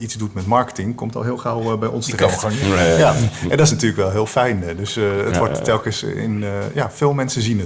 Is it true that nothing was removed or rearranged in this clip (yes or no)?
yes